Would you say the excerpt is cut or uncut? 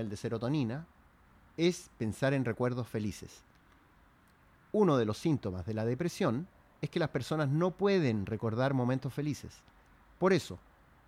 uncut